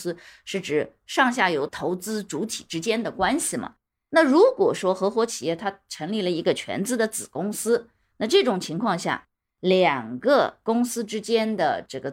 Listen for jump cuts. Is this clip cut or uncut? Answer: uncut